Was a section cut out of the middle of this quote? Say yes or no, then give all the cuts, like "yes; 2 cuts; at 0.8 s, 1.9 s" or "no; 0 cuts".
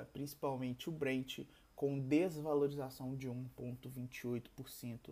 no; 0 cuts